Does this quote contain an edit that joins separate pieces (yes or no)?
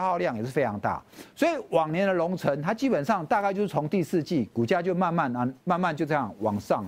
yes